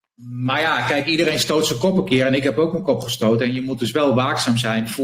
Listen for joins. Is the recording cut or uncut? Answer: uncut